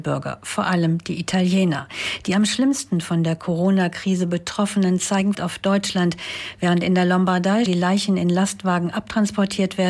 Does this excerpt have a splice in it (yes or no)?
yes